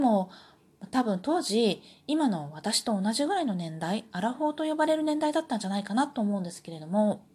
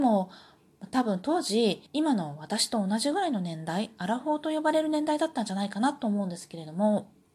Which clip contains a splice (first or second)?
second